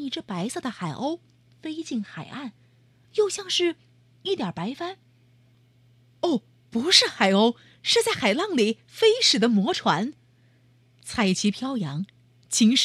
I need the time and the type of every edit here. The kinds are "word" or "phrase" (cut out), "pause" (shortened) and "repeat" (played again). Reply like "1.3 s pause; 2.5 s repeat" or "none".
3.0 s word; 6.6 s word

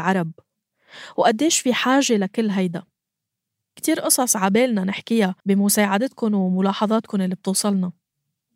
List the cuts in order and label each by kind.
3.8 s word; 5.4 s pause

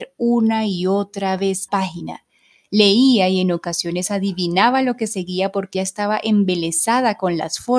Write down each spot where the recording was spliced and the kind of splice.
1.7 s word; 5.7 s word

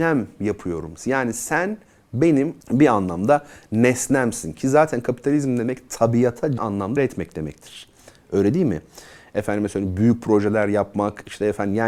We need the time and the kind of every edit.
2.6 s word; 6.6 s word; 7.0 s word

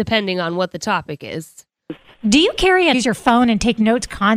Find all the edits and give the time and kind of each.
2.9 s phrase

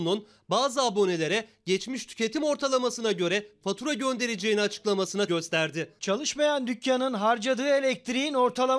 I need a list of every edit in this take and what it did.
5.3 s word

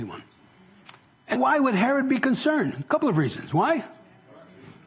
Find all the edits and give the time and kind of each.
1.4 s word

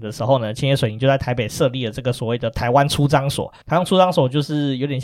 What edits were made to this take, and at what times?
3.6 s pause

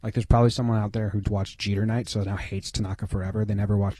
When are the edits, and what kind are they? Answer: 1.2 s word

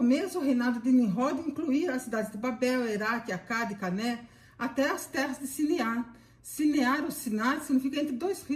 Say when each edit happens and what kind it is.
none

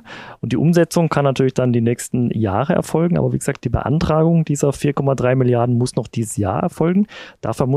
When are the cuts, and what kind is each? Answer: none

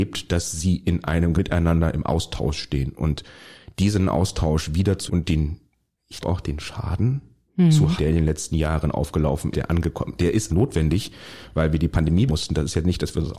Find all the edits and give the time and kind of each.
1.4 s word; 5.1 s word; 6.2 s word; 8.0 s word; 9.5 s word; 10.5 s word; 12.3 s word

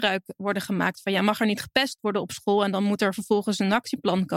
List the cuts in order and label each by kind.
none

